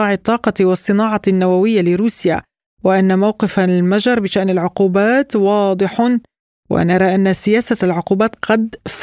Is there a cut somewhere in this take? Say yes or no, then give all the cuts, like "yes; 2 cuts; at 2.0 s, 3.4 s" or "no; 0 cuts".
no; 0 cuts